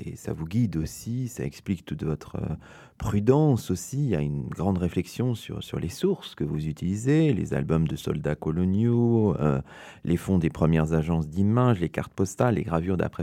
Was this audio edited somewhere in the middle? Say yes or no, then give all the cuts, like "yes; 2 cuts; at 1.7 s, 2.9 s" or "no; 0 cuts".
no; 0 cuts